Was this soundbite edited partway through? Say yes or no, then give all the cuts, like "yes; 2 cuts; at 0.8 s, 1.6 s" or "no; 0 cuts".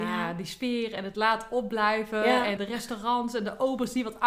yes; 1 cut; at 2.6 s